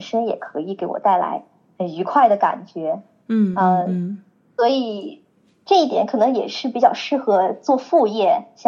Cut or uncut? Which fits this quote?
uncut